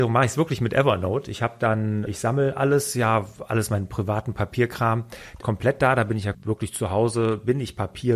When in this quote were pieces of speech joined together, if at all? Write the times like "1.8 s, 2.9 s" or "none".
2.1 s, 5.4 s, 6.3 s